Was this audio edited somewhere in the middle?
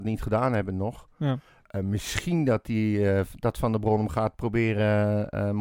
no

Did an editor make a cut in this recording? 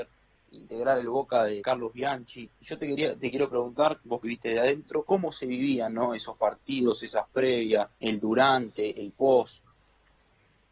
yes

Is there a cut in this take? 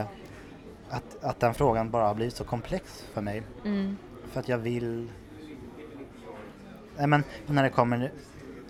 yes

